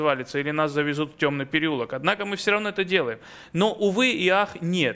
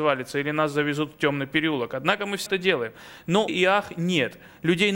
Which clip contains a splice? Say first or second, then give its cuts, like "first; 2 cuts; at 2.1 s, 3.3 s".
second; 2 cuts; at 2.5 s, 3.5 s